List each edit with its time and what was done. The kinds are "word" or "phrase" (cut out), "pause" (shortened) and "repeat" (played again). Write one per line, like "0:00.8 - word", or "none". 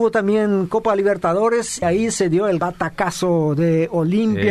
0:01.8 - word
0:02.6 - word